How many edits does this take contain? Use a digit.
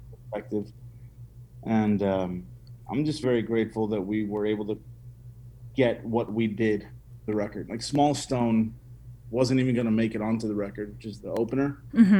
3